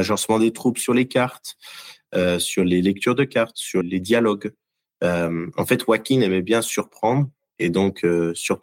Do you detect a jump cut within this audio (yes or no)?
yes